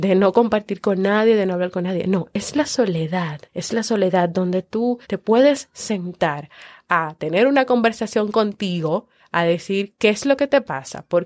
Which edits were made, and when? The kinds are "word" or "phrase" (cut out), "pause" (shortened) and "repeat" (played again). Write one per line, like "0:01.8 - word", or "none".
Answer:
0:03.5 - pause
0:05.0 - pause
0:09.2 - pause